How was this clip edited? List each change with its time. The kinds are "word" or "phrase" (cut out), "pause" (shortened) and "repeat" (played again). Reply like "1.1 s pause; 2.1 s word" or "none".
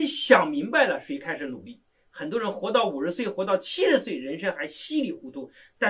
1.9 s pause